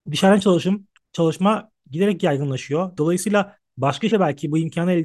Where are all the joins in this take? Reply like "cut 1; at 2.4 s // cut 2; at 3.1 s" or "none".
cut 1; at 1.0 s // cut 2; at 3.0 s // cut 3; at 4.1 s